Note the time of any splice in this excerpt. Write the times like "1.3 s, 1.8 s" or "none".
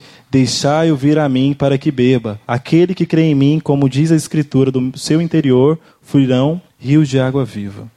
2.4 s, 6.7 s